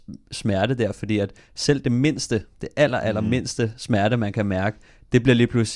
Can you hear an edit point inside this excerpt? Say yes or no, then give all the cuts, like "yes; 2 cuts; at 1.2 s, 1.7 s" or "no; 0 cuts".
no; 0 cuts